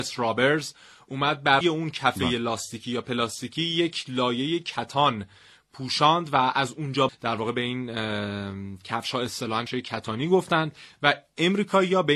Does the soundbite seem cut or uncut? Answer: cut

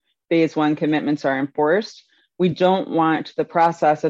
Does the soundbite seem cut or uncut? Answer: uncut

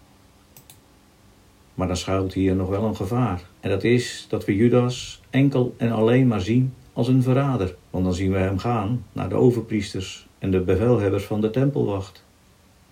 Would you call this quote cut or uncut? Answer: cut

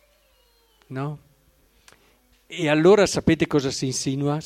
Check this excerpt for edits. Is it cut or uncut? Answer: uncut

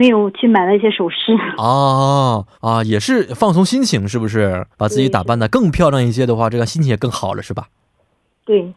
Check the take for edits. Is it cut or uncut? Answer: cut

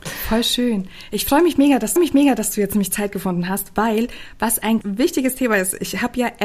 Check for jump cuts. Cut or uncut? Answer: cut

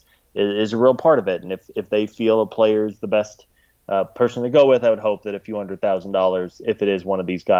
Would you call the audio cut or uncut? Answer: uncut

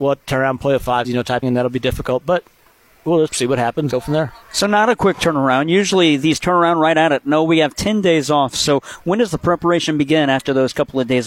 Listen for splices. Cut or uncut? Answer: cut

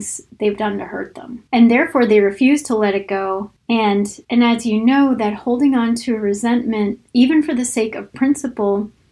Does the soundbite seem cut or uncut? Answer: cut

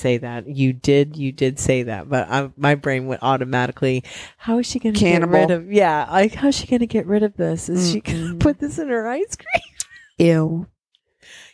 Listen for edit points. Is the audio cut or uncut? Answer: uncut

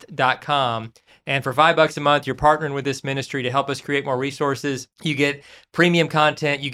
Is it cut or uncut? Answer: cut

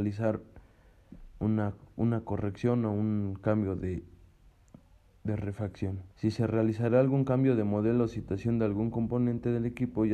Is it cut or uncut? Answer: cut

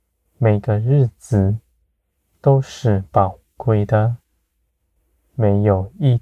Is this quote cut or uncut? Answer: uncut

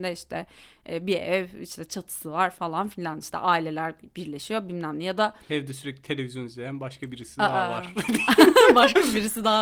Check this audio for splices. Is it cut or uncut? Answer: uncut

